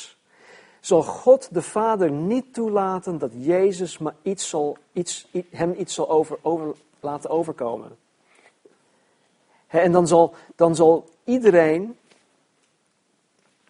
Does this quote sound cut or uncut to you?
uncut